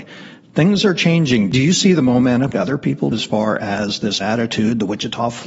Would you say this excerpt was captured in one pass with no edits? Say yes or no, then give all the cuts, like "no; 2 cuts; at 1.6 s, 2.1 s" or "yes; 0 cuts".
no; 3 cuts; at 2.5 s, 3.1 s, 4.2 s